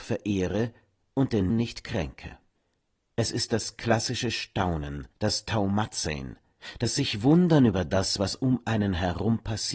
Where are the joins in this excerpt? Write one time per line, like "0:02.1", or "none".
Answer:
0:01.5
0:02.5
0:05.1